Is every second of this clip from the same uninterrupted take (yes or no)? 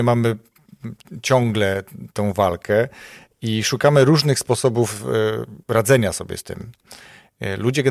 yes